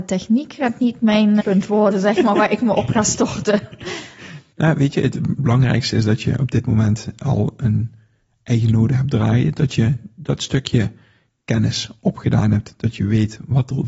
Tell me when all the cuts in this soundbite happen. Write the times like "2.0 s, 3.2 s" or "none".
1.4 s

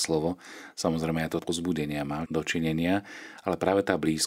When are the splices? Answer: 1.4 s, 2.3 s

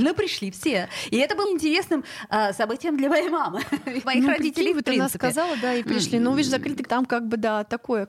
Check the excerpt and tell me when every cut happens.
1.4 s, 4.0 s, 5.8 s, 6.9 s

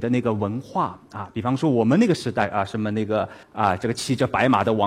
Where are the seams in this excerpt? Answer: 3.4 s

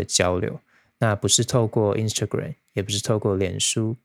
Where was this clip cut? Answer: none

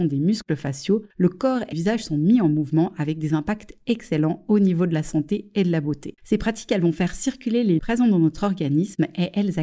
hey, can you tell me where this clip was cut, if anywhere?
1.1 s, 1.7 s, 6.2 s, 7.8 s

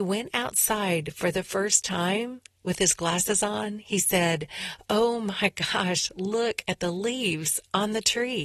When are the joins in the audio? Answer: none

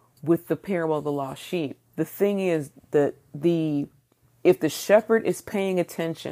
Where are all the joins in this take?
1.9 s

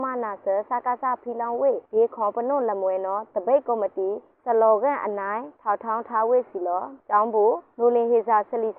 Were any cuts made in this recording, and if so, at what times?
none

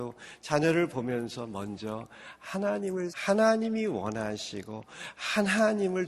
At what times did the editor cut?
3.1 s

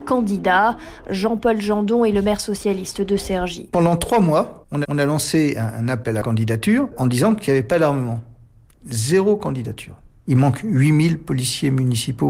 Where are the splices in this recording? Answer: 4.8 s

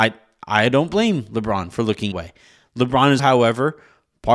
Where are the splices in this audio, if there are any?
2.1 s, 3.2 s

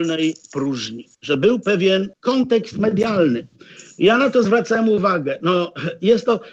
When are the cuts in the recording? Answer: 1.1 s, 2.1 s

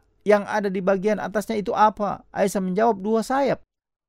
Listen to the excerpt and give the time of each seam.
none

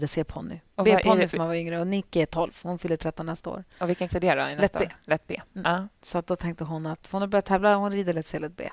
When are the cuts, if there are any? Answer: 4.1 s

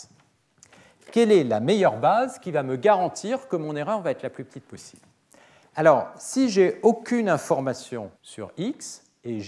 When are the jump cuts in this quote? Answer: 8.1 s

